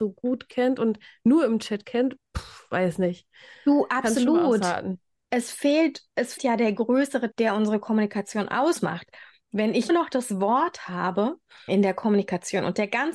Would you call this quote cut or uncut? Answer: cut